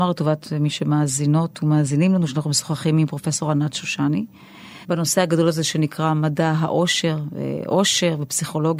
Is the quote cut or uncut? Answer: cut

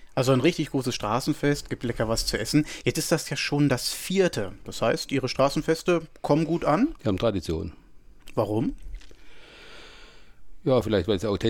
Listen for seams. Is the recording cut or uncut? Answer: uncut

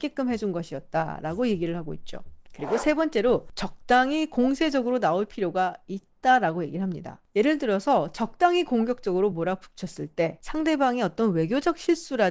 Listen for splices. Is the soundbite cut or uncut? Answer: uncut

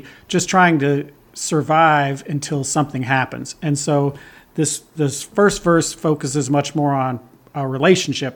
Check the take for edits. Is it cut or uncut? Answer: uncut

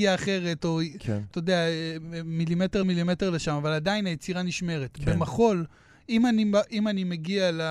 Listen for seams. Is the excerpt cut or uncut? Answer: cut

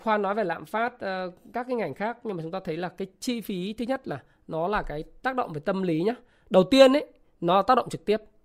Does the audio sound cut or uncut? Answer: uncut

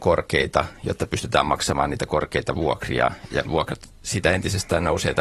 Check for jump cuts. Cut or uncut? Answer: cut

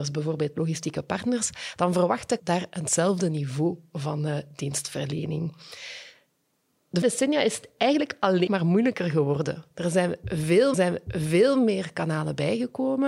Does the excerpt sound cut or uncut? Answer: cut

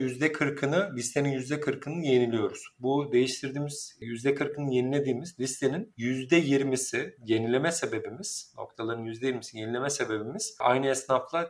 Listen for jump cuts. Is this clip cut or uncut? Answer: cut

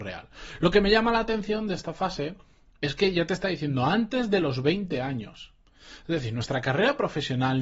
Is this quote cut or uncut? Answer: uncut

